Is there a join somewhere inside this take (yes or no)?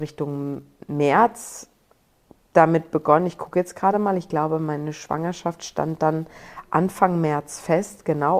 no